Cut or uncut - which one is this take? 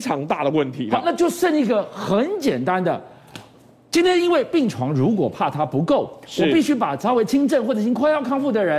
uncut